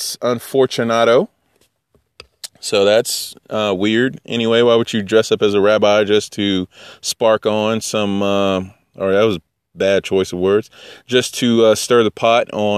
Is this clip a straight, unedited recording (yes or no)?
yes